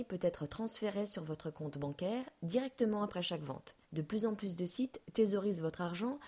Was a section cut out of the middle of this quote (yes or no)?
yes